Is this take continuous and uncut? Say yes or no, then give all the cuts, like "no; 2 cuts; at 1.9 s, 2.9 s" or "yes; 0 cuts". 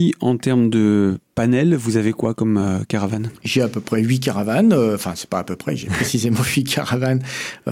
yes; 0 cuts